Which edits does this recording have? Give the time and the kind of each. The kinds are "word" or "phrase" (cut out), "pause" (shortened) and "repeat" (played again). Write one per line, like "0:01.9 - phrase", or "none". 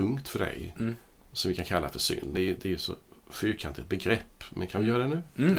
0:02.3 - word